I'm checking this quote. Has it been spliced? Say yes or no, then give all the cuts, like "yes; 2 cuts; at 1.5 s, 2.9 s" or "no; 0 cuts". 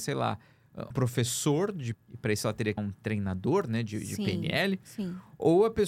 yes; 3 cuts; at 0.9 s, 1.9 s, 2.8 s